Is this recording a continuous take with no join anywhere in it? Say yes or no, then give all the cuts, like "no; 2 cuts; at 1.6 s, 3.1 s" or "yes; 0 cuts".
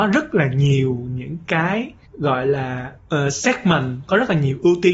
no; 2 cuts; at 2.1 s, 3.0 s